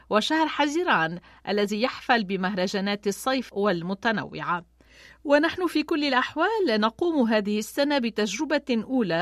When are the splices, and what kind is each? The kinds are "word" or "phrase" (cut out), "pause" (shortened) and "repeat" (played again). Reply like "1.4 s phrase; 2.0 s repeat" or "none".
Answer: 3.5 s word